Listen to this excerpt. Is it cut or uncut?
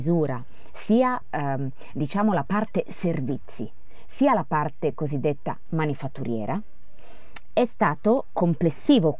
uncut